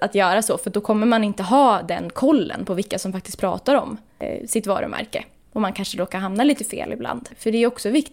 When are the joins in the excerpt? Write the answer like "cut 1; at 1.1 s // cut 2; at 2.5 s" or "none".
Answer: none